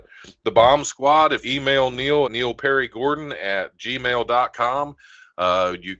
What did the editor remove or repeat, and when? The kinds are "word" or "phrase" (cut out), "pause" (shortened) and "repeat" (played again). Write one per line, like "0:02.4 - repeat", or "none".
0:01.4 - word
0:02.2 - word